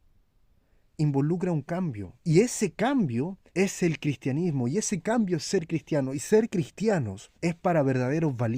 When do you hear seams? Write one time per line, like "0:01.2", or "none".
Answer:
0:02.2
0:03.5
0:07.3

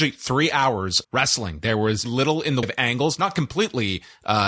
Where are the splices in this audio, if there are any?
0:01.0
0:02.0
0:02.6

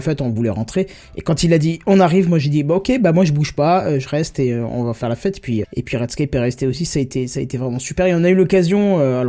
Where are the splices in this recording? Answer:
0:05.6

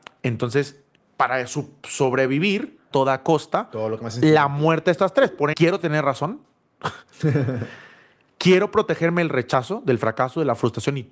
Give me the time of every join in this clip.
0:01.0
0:02.9
0:05.5

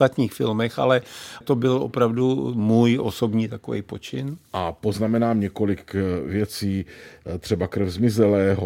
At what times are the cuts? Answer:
0:01.4

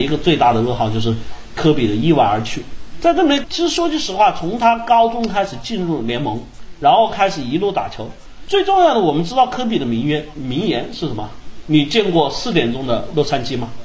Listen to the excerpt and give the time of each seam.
0:03.4

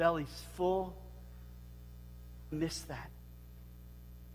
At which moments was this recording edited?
0:02.5

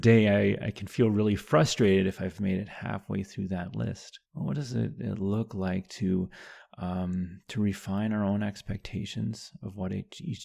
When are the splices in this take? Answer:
0:04.3

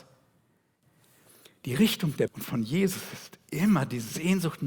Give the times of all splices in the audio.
0:02.3

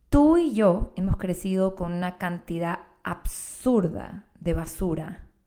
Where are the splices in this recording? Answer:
none

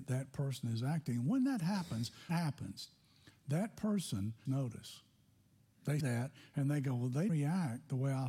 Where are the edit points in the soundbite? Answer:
0:02.3
0:04.5
0:06.0
0:07.3

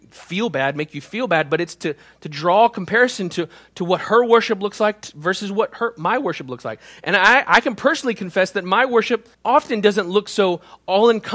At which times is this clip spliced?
0:09.3

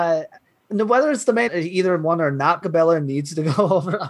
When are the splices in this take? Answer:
0:01.5
0:02.6

